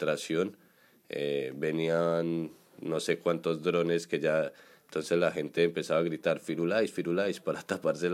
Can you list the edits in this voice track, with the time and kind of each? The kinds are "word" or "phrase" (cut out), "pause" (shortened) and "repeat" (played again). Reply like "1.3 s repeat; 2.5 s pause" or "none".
none

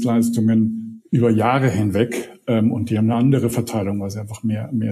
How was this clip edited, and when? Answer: none

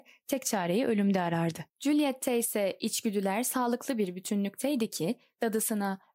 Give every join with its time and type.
1.7 s pause

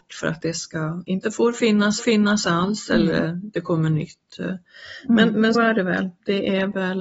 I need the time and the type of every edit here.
2.0 s repeat; 5.5 s word

